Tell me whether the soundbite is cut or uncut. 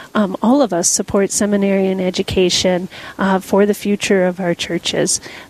uncut